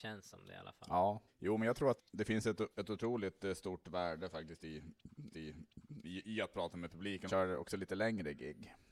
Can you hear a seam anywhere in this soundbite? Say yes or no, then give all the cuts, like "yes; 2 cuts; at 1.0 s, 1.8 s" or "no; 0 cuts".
yes; 5 cuts; at 1.3 s, 2.0 s, 2.7 s, 5.3 s, 7.3 s